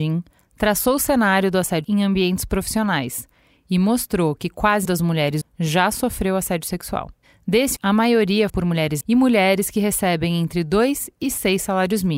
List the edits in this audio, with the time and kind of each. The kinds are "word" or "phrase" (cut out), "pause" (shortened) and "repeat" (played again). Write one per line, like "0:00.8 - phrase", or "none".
0:01.8 - word
0:04.8 - word
0:05.4 - word
0:07.8 - word
0:08.5 - word
0:09.0 - word